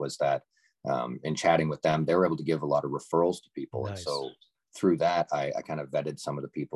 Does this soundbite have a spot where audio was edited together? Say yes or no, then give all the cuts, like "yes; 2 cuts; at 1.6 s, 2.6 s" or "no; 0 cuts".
no; 0 cuts